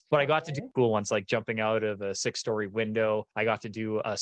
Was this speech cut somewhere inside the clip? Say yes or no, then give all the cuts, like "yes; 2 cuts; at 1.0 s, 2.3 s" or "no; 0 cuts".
yes; 1 cut; at 3.3 s